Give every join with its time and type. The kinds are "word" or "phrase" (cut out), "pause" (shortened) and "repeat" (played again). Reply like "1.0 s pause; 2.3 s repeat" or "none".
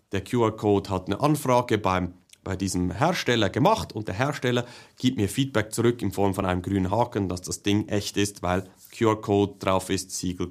none